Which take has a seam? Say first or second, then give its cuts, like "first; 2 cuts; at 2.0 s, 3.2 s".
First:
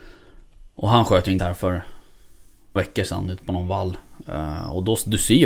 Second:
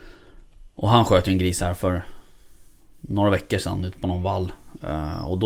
first; 2 cuts; at 1.4 s, 2.8 s